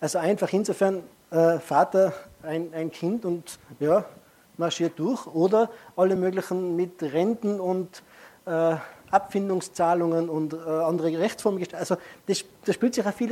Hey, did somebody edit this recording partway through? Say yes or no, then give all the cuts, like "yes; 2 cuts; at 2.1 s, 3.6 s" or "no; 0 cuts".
no; 0 cuts